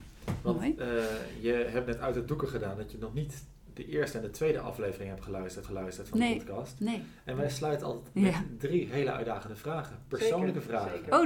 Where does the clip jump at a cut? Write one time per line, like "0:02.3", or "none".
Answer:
0:05.6
0:08.1